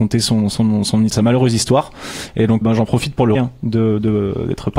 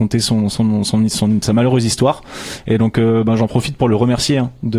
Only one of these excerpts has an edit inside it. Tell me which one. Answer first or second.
first